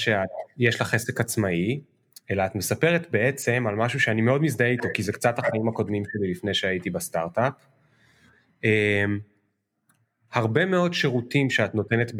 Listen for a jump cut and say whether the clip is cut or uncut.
uncut